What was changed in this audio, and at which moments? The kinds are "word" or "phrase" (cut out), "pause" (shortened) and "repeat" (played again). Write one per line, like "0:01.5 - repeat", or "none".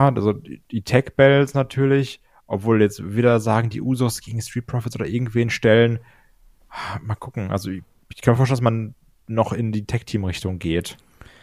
none